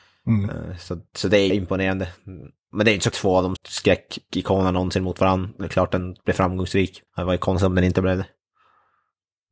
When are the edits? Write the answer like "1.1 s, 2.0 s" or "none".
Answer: 1.1 s, 1.5 s, 3.1 s, 3.6 s, 7.1 s

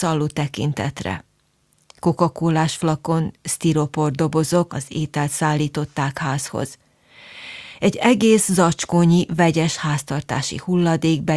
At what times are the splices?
4.7 s

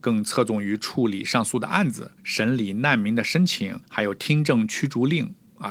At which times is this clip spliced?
2.2 s, 3.8 s

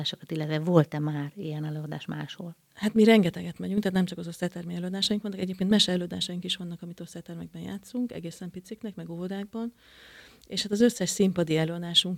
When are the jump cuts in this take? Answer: none

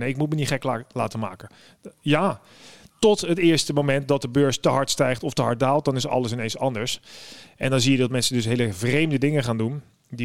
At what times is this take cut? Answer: none

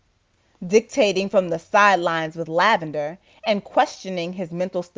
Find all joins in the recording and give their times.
none

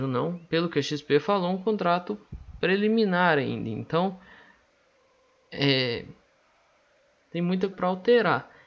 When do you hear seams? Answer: 7.7 s

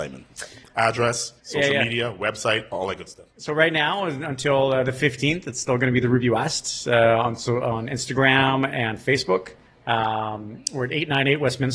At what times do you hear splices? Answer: 1.4 s, 9.6 s

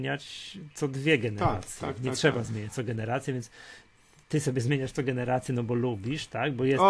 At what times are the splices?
none

